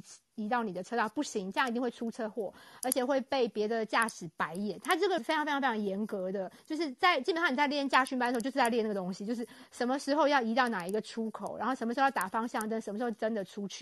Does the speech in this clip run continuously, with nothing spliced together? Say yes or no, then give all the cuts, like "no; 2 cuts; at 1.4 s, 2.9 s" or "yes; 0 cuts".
no; 2 cuts; at 5.2 s, 6.6 s